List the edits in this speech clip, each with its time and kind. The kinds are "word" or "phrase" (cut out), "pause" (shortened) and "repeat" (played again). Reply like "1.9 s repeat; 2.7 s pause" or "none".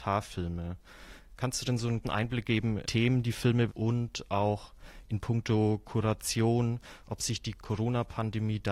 2.0 s word; 2.8 s phrase; 3.7 s word